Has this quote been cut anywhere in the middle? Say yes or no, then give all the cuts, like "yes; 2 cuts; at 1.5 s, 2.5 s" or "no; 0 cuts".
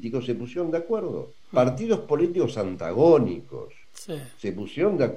yes; 2 cuts; at 1.4 s, 3.8 s